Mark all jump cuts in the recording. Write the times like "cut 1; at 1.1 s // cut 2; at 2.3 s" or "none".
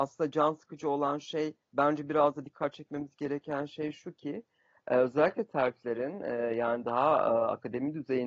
cut 1; at 1.6 s